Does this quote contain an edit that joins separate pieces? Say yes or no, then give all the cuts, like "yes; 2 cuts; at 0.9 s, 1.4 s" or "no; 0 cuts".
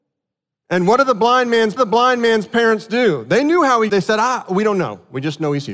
yes; 2 cuts; at 1.8 s, 3.9 s